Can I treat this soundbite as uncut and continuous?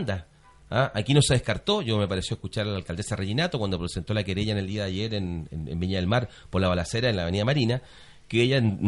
yes; 0 cuts

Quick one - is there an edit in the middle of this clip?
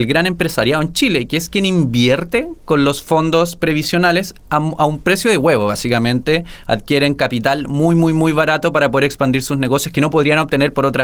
no; 0 cuts

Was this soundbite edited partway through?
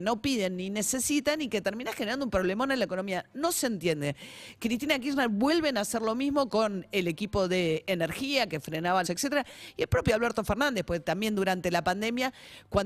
yes; 1 cut; at 9.0 s

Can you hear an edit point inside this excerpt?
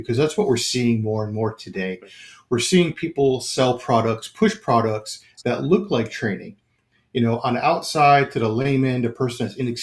no; 0 cuts

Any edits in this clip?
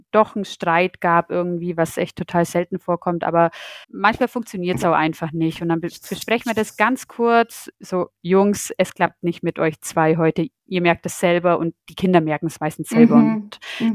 yes; 4 cuts; at 3.8 s, 7.7 s, 10.6 s, 11.8 s

